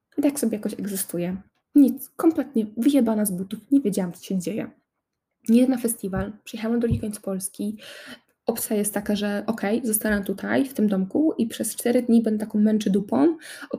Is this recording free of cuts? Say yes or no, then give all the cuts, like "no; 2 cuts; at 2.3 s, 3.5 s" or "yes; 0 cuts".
yes; 0 cuts